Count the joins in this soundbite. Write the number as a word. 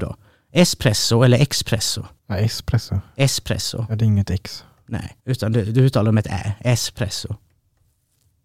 two